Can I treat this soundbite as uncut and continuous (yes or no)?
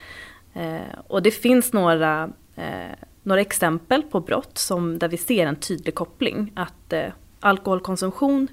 yes